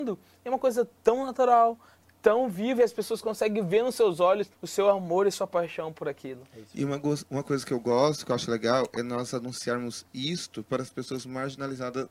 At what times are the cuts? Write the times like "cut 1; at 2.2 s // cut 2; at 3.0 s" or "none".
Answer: cut 1; at 4.5 s